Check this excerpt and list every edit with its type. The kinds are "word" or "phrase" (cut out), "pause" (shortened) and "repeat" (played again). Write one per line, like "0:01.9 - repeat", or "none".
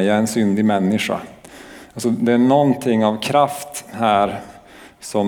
none